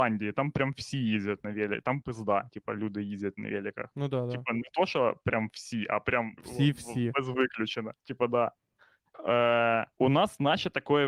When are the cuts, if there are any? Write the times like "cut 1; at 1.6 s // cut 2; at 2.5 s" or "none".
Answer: cut 1; at 2.0 s // cut 2; at 6.4 s // cut 3; at 8.0 s // cut 4; at 9.9 s